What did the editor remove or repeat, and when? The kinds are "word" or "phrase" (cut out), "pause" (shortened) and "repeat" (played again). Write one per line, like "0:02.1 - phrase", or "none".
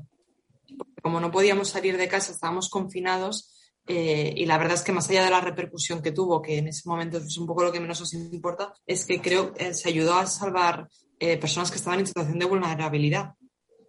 0:08.8 - pause